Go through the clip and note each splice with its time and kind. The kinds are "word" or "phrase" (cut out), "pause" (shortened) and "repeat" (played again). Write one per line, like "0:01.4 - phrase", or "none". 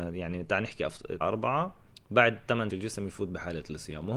0:01.2 - phrase
0:01.9 - pause
0:02.7 - phrase